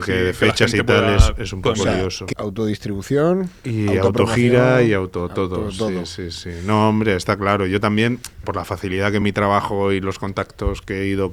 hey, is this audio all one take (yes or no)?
no